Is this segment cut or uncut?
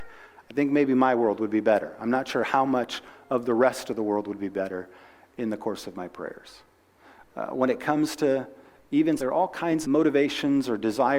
cut